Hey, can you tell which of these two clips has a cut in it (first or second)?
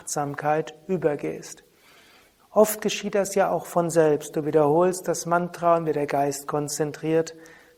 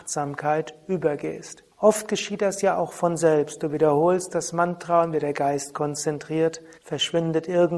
second